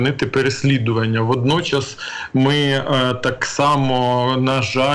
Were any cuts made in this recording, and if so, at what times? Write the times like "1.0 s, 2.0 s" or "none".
none